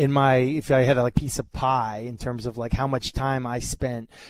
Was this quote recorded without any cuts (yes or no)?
no